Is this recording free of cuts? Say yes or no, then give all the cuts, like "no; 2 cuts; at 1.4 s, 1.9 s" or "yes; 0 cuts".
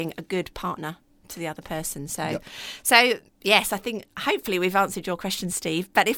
yes; 0 cuts